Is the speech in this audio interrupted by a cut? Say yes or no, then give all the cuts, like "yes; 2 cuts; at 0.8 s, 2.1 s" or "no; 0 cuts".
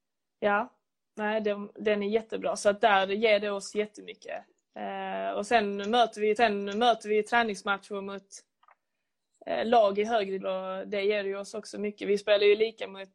yes; 2 cuts; at 6.4 s, 10.4 s